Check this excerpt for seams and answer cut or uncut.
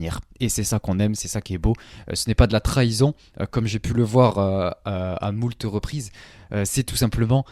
uncut